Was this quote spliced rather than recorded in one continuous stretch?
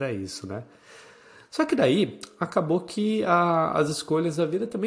no; 0 cuts

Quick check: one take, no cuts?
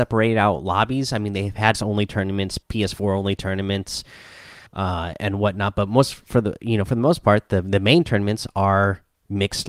no; 3 cuts; at 1.7 s, 2.6 s, 4.7 s

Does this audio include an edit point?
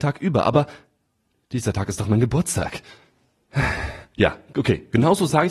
no; 0 cuts

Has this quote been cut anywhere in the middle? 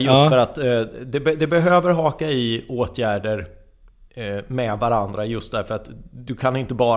no; 0 cuts

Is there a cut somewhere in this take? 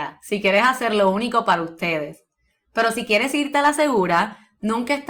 no; 0 cuts

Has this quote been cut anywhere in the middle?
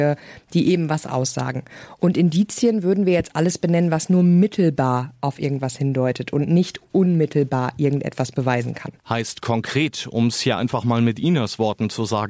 yes; 1 cut; at 9.0 s

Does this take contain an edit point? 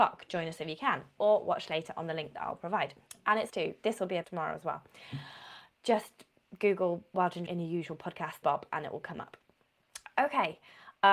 yes; 4 cuts; at 3.5 s, 4.2 s, 7.5 s, 8.4 s

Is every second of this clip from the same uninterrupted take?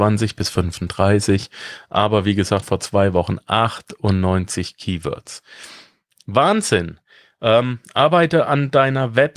yes; 0 cuts

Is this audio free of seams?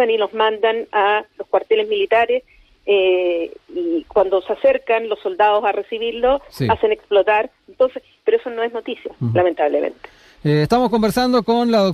yes; 0 cuts

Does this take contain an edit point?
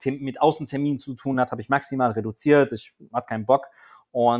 no; 0 cuts

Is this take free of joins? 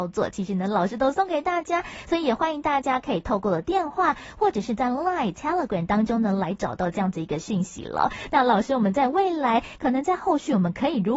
yes; 0 cuts

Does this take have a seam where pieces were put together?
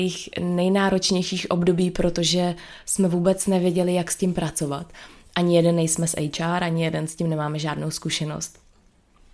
no; 0 cuts

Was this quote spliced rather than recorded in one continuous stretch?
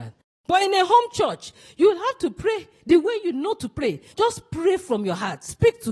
no; 0 cuts

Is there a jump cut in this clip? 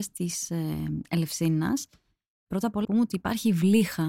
yes; 1 cut; at 2.8 s

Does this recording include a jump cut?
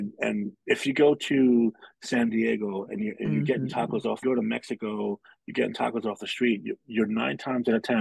yes; 1 cut; at 4.2 s

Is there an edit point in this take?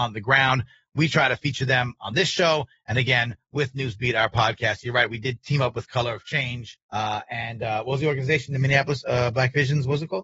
yes; 1 cut; at 6.8 s

